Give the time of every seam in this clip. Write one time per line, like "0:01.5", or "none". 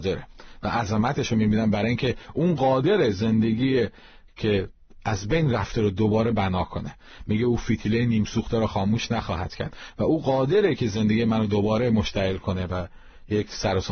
none